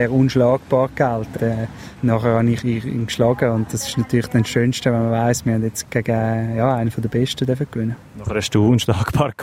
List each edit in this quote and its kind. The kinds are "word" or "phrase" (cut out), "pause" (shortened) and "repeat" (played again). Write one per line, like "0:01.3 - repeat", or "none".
0:01.4 - word
0:02.6 - word
0:05.8 - word